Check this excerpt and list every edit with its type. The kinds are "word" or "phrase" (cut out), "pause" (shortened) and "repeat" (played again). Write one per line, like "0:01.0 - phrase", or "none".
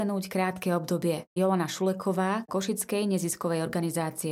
0:01.4 - word
0:02.5 - word